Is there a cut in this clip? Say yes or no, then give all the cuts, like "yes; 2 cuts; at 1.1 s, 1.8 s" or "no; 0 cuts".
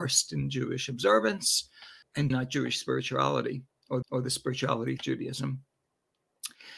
yes; 3 cuts; at 2.3 s, 4.0 s, 5.0 s